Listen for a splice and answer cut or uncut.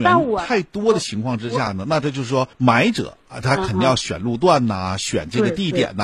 cut